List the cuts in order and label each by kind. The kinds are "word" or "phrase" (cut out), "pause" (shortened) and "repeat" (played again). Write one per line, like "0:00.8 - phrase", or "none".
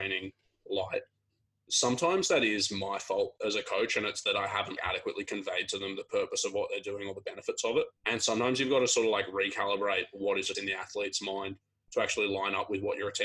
0:04.8 - word
0:08.0 - pause
0:10.5 - phrase